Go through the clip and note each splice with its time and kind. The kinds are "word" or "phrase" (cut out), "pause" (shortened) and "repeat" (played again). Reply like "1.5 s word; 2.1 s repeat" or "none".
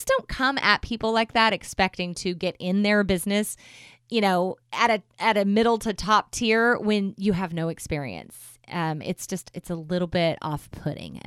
4.6 s pause